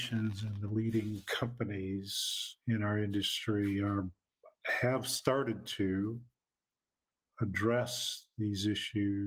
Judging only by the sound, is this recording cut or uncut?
cut